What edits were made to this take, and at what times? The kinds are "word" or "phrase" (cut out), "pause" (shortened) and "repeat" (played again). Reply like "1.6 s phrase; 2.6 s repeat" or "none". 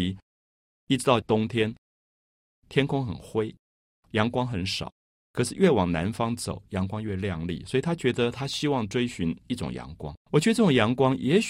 10.2 s pause